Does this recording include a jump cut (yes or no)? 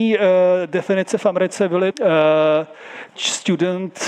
yes